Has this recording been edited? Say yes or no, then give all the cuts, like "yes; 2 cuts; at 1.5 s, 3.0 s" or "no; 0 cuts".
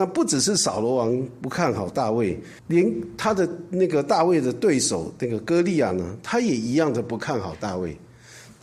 yes; 1 cut; at 2.6 s